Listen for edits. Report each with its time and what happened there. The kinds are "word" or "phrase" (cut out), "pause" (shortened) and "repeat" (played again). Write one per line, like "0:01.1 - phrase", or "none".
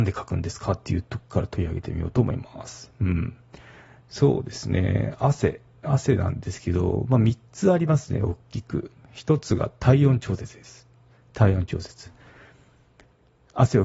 none